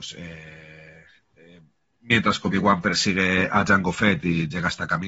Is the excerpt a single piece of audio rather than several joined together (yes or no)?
yes